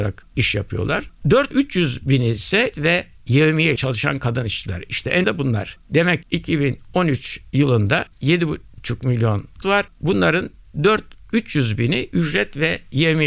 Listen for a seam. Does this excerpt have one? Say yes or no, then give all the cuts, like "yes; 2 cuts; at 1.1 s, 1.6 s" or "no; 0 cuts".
yes; 8 cuts; at 1.5 s, 2.7 s, 3.8 s, 5.2 s, 6.2 s, 8.1 s, 9.6 s, 11.3 s